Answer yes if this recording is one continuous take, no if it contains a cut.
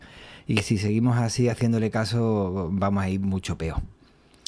yes